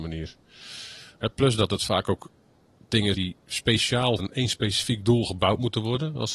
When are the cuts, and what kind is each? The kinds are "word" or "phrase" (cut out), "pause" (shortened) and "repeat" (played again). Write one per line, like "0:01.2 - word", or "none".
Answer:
0:03.1 - word
0:04.2 - word

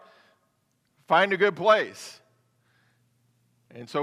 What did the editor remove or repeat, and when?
none

